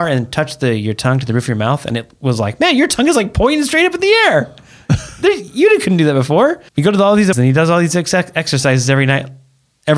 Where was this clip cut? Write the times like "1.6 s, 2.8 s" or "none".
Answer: 6.7 s, 7.3 s